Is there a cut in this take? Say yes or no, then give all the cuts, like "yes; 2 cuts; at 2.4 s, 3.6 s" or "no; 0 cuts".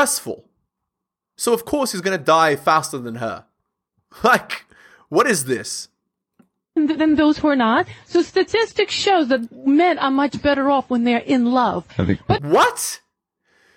no; 0 cuts